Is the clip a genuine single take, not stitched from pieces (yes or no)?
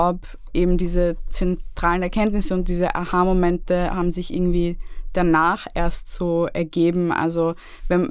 yes